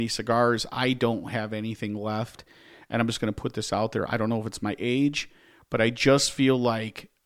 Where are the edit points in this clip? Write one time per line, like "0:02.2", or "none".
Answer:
none